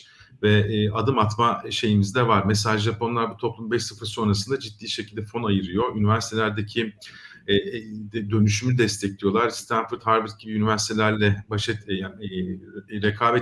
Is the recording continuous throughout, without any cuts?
yes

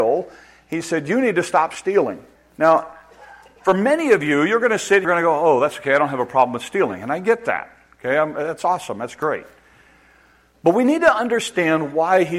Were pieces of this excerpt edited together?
yes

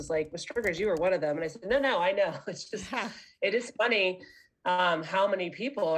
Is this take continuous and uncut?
yes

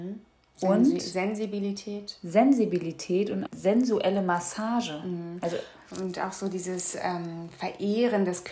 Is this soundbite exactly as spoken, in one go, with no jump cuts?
no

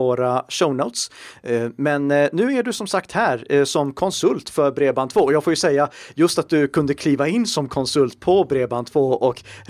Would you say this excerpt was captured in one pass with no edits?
yes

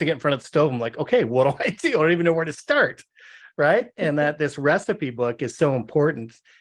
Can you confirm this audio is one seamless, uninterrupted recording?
yes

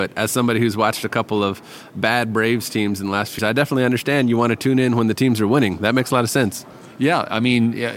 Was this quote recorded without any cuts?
no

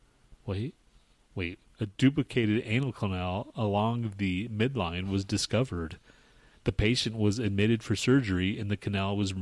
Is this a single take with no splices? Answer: yes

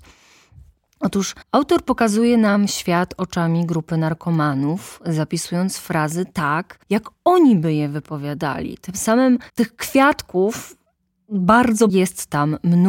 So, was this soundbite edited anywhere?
yes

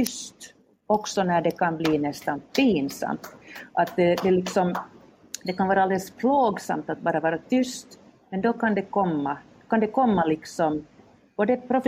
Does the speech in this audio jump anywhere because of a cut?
no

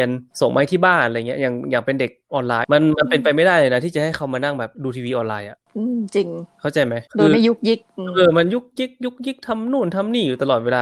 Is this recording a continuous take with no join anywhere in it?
no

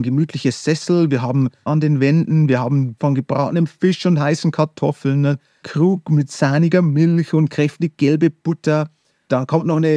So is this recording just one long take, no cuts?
no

